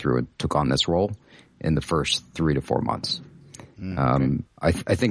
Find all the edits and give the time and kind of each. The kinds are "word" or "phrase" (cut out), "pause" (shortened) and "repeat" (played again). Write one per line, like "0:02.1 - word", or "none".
none